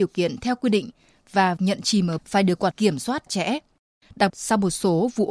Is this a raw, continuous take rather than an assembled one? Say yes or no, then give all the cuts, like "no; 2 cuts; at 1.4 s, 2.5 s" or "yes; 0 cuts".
no; 5 cuts; at 1.6 s, 2.2 s, 2.7 s, 3.3 s, 4.3 s